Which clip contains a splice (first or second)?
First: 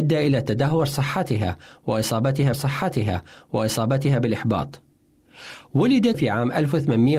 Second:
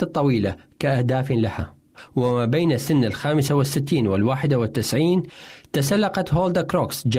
first